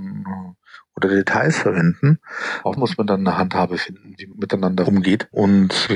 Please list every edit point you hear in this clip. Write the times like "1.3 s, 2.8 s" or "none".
2.8 s, 4.3 s